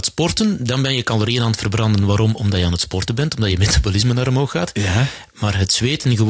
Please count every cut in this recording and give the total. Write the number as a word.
zero